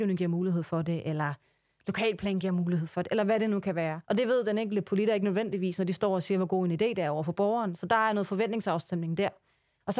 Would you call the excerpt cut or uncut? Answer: cut